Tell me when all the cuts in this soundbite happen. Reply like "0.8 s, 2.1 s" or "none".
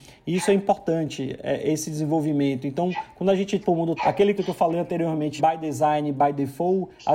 3.6 s, 4.0 s, 4.4 s, 5.4 s

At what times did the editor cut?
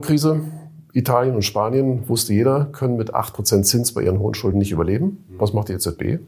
none

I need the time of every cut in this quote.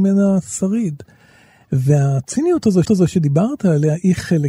2.8 s

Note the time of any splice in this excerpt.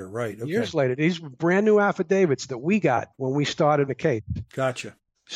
3.1 s, 3.9 s

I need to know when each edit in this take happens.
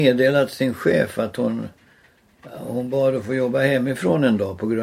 none

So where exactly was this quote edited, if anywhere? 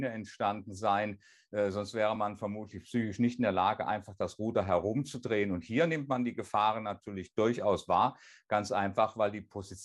none

